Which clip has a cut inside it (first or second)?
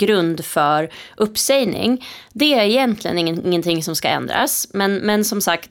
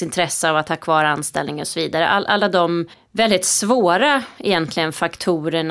second